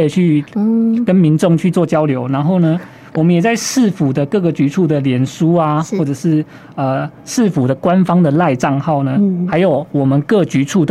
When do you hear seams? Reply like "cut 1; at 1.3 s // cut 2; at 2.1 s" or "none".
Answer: none